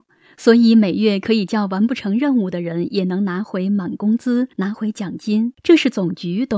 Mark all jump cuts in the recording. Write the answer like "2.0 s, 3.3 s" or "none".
4.5 s, 5.5 s